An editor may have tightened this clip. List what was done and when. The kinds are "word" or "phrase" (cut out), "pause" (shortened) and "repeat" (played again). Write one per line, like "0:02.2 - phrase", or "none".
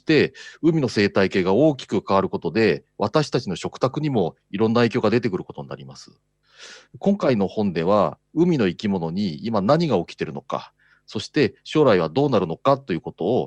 none